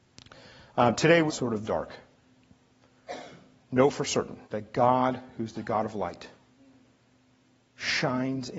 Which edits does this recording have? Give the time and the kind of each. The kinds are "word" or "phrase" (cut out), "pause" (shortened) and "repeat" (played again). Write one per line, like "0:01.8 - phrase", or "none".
0:01.3 - phrase
0:01.6 - phrase
0:04.4 - pause